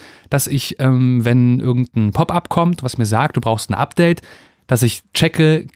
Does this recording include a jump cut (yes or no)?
no